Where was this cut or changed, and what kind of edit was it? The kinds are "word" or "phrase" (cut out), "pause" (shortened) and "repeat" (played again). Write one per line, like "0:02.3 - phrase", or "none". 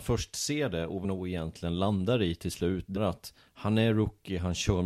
0:01.0 - word
0:03.0 - word